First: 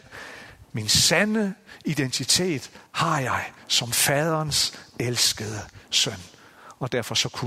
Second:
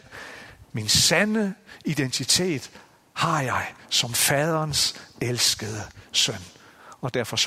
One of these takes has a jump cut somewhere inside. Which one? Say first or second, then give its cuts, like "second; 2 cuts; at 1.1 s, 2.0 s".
first; 1 cut; at 2.9 s